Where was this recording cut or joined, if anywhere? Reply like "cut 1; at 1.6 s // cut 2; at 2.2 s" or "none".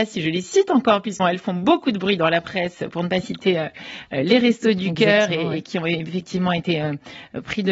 cut 1; at 1.2 s